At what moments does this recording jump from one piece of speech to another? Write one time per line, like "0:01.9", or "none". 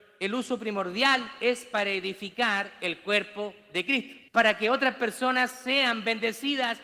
0:04.3

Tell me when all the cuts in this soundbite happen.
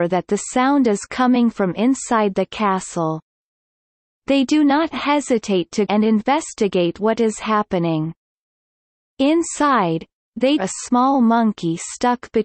0:05.9
0:10.6

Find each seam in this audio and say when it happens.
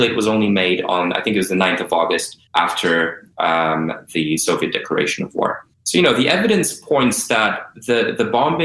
0:02.5
0:05.7

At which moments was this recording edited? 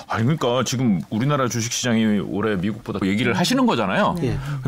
0:03.0

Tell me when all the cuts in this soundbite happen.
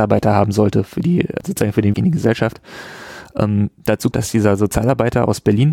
0:01.4
0:01.9
0:04.1

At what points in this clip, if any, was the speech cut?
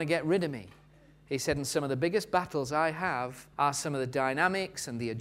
0:03.5

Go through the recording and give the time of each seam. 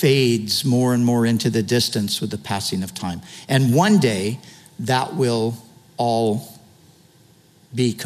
none

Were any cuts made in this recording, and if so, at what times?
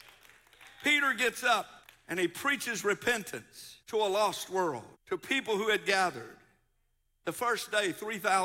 0:01.8
0:03.8
0:04.9

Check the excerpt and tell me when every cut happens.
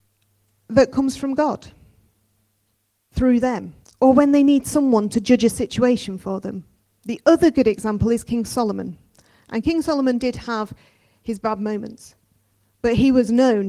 0:03.8

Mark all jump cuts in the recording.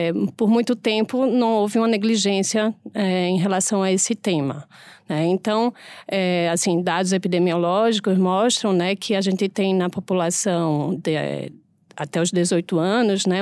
none

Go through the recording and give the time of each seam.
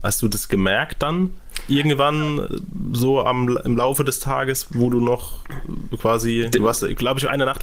none

